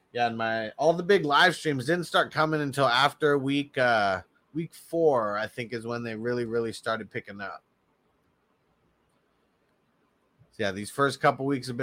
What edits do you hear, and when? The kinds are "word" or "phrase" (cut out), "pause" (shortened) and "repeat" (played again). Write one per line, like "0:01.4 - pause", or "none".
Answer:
none

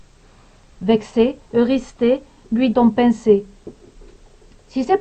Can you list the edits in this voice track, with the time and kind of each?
0:01.5 - pause
0:02.7 - phrase

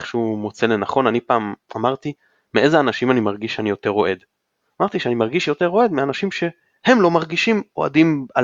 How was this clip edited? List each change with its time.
none

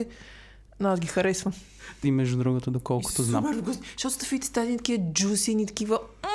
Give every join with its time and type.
0:02.0 - phrase

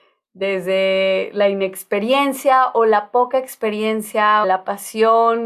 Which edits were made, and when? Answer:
0:04.4 - word

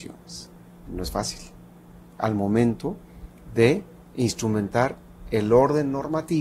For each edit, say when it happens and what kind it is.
none

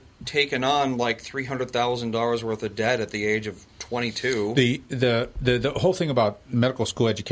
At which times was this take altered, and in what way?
0:03.7 - pause

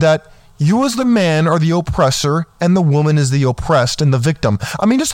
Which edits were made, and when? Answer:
none

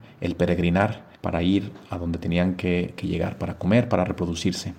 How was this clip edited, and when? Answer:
0:01.1 - pause

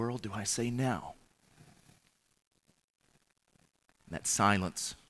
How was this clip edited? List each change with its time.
none

